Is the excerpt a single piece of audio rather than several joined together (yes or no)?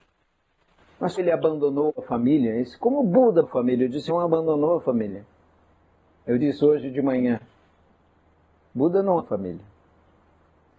no